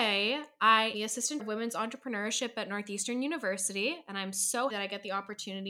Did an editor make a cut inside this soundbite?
yes; 3 cuts; at 0.9 s, 1.4 s, 4.7 s

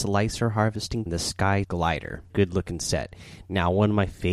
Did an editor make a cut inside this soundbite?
yes; 3 cuts; at 1.1 s, 1.6 s, 2.3 s

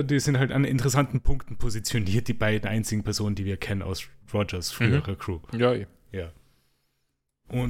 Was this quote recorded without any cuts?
no; 1 cut; at 4.2 s

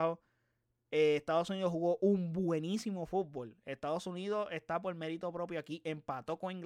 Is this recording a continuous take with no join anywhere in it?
yes; 0 cuts

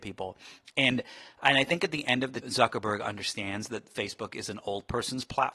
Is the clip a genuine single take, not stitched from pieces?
no; 1 cut; at 2.4 s

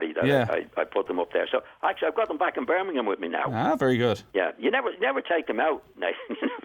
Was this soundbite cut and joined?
yes; 1 cut; at 4.3 s

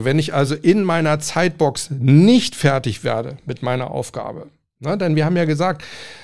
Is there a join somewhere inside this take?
no; 0 cuts

